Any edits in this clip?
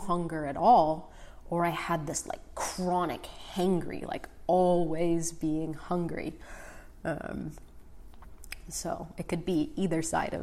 no; 0 cuts

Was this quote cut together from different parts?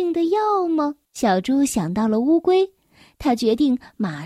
yes; 1 cut; at 1.0 s

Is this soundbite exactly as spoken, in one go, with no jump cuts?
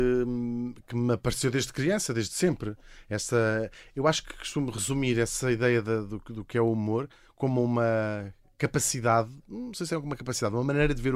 yes; 0 cuts

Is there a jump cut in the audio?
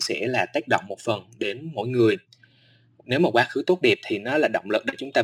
no; 0 cuts

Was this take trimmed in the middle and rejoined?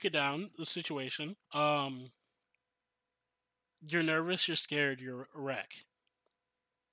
yes; 1 cut; at 1.4 s

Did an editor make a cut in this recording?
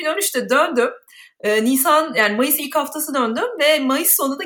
no; 0 cuts

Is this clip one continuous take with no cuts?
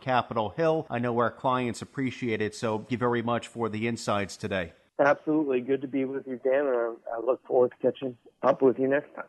no; 1 cut; at 2.9 s

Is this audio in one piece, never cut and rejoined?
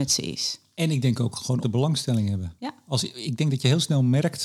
no; 1 cut; at 1.6 s

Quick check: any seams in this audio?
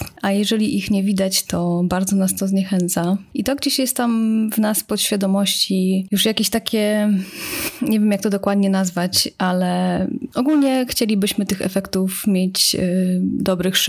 no; 0 cuts

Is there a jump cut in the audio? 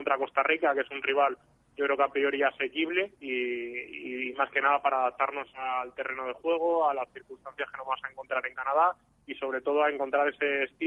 yes; 1 cut; at 3.2 s

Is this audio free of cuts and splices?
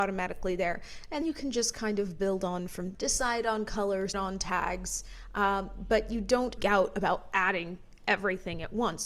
no; 4 cuts; at 1.2 s, 2.9 s, 4.1 s, 6.6 s

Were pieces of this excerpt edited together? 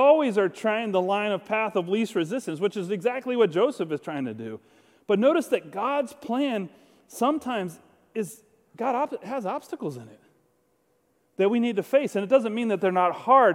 no; 0 cuts

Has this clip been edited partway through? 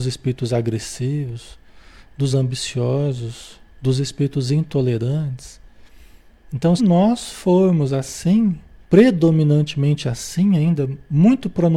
yes; 3 cuts; at 2.3 s, 6.8 s, 8.8 s

